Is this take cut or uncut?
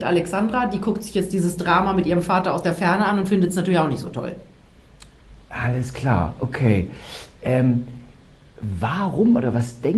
uncut